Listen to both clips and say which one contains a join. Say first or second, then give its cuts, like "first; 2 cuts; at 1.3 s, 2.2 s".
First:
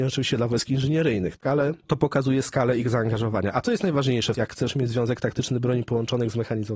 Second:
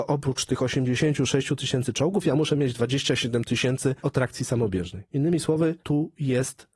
second; 1 cut; at 4.0 s